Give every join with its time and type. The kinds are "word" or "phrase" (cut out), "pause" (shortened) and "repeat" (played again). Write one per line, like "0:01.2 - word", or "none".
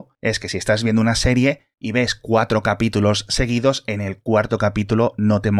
0:01.7 - pause